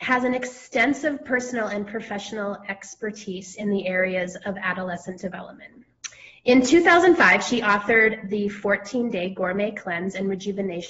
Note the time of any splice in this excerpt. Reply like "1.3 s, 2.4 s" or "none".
none